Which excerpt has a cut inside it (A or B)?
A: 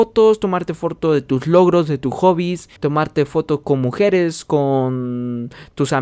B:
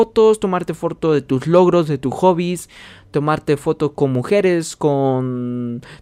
A